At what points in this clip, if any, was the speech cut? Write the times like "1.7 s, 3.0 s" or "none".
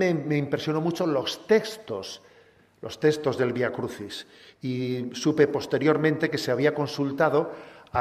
none